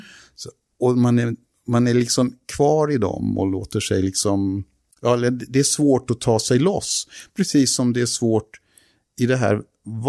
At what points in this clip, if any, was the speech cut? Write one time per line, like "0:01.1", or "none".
none